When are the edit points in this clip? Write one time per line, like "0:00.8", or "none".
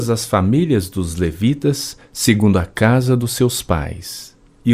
none